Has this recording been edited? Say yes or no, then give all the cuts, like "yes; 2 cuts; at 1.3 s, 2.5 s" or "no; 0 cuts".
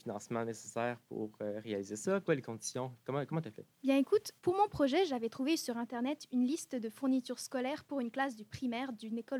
yes; 3 cuts; at 2.2 s, 3.7 s, 4.4 s